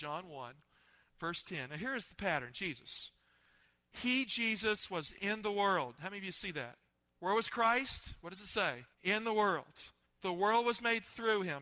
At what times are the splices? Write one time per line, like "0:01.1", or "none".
0:06.9
0:08.9
0:10.0